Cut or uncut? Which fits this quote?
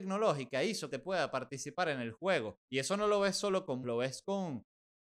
cut